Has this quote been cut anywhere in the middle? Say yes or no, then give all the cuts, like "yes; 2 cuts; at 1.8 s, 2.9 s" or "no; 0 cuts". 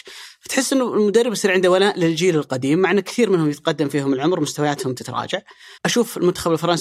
yes; 1 cut; at 5.8 s